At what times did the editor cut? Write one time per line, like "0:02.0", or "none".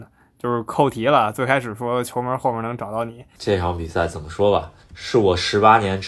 0:04.8